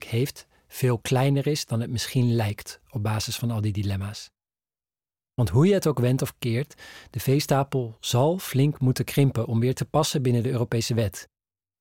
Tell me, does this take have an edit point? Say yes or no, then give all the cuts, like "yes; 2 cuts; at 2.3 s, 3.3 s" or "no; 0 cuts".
no; 0 cuts